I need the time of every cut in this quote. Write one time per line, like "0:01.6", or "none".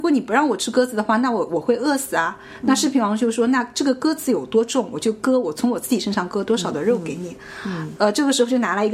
none